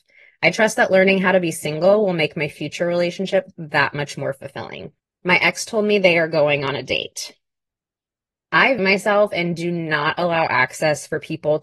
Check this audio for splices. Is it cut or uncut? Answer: cut